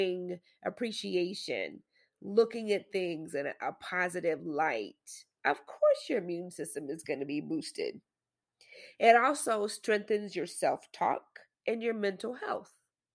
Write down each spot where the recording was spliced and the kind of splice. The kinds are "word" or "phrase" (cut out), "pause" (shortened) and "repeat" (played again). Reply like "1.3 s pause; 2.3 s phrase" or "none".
none